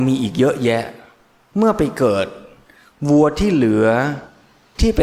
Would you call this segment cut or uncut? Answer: uncut